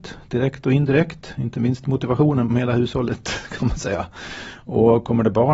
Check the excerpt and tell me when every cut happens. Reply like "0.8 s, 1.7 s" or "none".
2.5 s